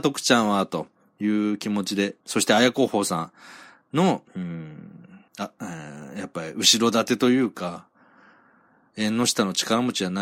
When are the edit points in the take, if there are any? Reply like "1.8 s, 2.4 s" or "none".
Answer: 2.2 s, 4.3 s, 5.3 s